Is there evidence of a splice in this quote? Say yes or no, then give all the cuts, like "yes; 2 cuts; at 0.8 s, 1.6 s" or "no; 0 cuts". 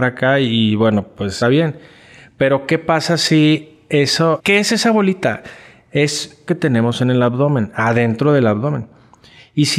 yes; 3 cuts; at 1.4 s, 4.4 s, 6.5 s